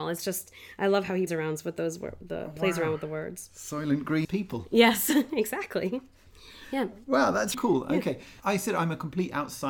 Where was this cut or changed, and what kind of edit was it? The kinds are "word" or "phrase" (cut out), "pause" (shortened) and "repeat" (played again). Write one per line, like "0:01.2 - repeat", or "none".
0:01.3 - word
0:04.2 - word
0:07.5 - word
0:08.4 - word

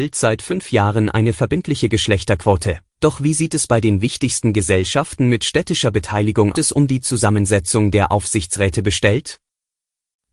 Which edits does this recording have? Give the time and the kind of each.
0:02.9 - pause
0:06.5 - phrase

